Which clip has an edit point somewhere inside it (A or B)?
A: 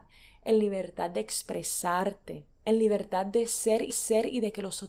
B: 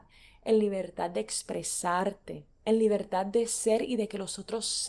A